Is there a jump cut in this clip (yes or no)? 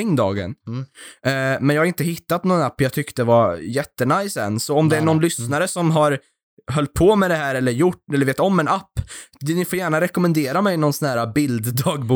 no